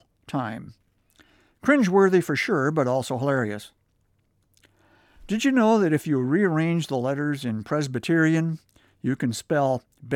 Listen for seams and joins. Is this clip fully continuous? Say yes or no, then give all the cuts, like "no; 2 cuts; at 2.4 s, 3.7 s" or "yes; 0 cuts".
yes; 0 cuts